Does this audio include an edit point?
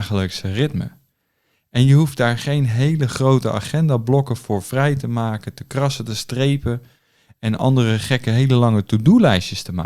no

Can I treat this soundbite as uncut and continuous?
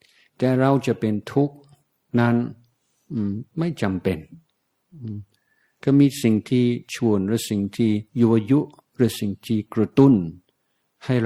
no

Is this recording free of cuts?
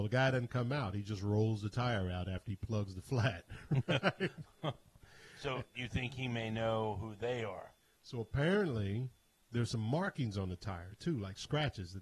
no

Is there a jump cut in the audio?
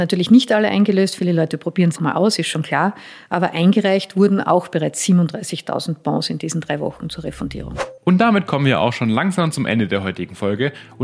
yes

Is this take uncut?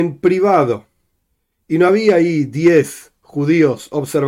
yes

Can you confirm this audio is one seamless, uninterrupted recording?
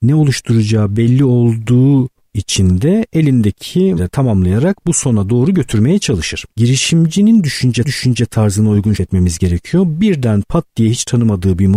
no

